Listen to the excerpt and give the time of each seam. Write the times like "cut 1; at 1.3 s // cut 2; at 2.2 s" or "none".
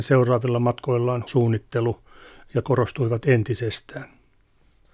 cut 1; at 1.3 s // cut 2; at 2.6 s